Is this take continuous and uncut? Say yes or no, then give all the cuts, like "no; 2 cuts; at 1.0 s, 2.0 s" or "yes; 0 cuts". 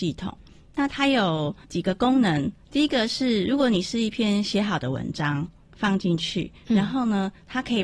yes; 0 cuts